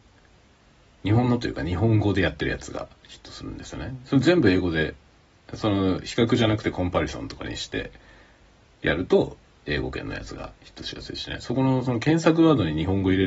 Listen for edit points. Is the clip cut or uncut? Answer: cut